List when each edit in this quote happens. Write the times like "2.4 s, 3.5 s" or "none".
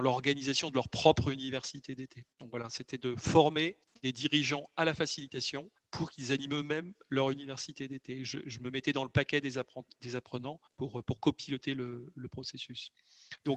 2.3 s, 3.8 s, 5.8 s, 10.7 s